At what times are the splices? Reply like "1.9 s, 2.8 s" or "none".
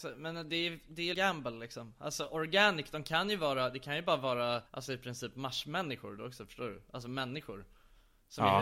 1.1 s, 4.7 s